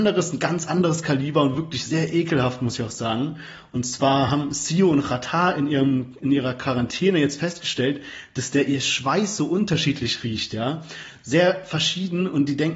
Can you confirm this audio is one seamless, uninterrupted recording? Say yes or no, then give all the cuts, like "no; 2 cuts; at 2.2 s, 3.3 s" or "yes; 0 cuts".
yes; 0 cuts